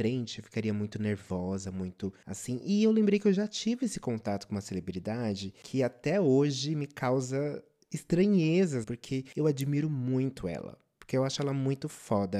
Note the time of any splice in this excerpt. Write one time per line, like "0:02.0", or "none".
0:08.8